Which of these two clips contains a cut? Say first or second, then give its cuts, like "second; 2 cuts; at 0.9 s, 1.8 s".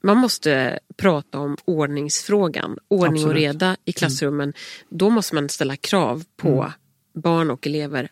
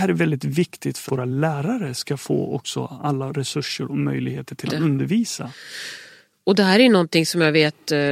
second; 2 cuts; at 1.1 s, 4.7 s